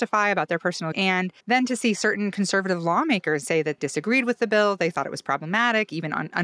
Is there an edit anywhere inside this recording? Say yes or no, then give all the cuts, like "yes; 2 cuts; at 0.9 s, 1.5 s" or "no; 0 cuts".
yes; 4 cuts; at 0.9 s, 1.4 s, 3.4 s, 3.8 s